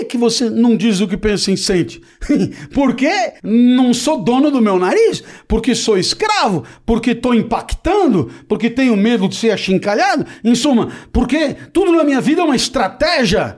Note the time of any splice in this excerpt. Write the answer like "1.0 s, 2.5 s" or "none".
3.4 s